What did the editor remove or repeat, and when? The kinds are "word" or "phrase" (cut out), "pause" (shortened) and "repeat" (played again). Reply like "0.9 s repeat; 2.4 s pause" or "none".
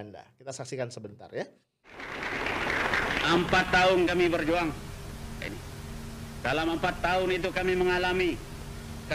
5.4 s phrase